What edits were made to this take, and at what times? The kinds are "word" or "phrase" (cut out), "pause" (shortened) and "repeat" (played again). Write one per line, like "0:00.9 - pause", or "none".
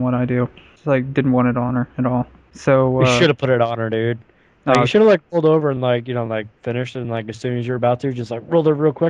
none